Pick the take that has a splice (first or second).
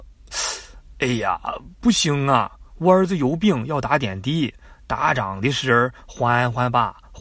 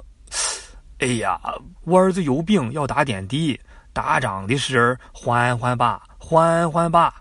second